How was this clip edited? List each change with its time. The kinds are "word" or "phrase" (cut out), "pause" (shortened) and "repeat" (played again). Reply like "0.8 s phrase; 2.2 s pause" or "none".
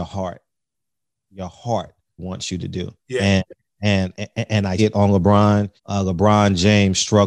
2.2 s word; 3.0 s pause; 4.1 s word; 4.8 s word; 5.8 s pause